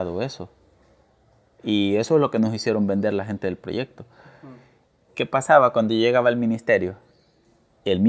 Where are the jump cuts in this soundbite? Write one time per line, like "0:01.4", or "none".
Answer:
0:05.1